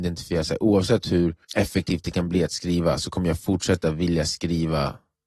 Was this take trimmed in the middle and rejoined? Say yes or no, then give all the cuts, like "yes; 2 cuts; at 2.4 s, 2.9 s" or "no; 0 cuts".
yes; 1 cut; at 1.4 s